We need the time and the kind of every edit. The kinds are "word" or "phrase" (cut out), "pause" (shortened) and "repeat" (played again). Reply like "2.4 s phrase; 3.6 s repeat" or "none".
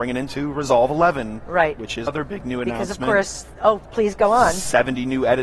2.1 s word; 3.8 s word